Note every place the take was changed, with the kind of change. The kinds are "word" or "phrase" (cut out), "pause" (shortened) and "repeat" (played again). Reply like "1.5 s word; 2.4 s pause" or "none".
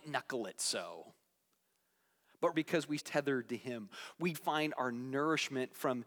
2.5 s word; 3.0 s word; 4.3 s word